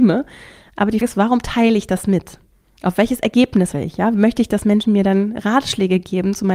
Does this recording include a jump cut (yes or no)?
yes